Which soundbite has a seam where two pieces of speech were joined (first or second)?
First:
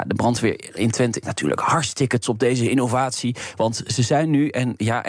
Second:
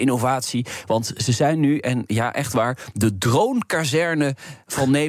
first